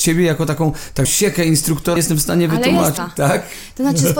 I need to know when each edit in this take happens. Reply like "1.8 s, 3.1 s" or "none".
1.0 s, 2.0 s, 3.0 s